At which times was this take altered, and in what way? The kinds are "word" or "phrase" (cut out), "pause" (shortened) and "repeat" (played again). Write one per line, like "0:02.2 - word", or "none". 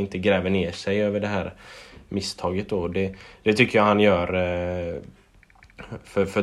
none